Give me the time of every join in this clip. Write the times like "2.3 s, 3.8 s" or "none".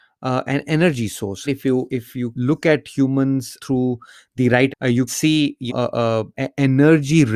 1.5 s, 1.9 s, 2.3 s, 3.6 s, 4.7 s, 5.1 s, 5.7 s, 6.3 s